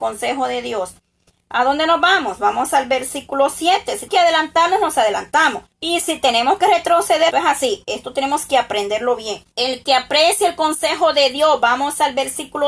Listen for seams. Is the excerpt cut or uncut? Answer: cut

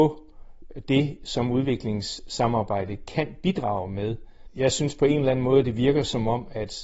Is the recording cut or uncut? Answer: uncut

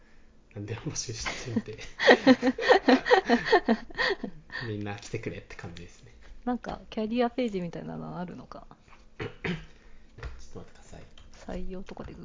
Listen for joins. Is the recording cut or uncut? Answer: cut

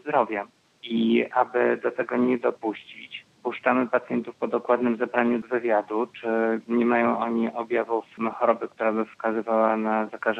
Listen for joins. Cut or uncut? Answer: uncut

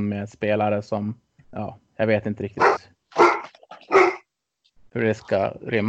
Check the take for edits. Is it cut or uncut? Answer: uncut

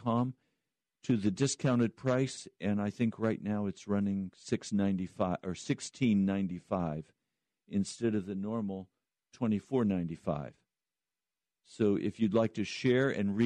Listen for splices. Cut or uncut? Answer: uncut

